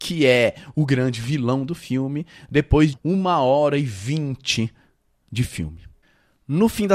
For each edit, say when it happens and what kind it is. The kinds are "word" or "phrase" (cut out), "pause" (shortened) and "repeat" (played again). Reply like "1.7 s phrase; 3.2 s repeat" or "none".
2.9 s word